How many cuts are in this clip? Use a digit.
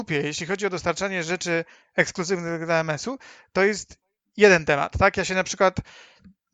0